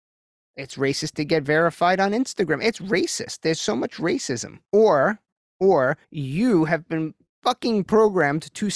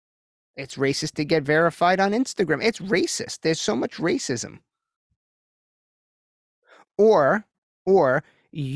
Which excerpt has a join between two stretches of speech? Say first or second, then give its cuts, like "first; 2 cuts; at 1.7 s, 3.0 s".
first; 2 cuts; at 4.6 s, 6.0 s